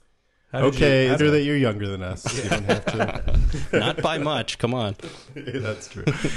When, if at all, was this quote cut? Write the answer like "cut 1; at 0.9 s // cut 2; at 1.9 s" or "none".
cut 1; at 1.2 s // cut 2; at 3.7 s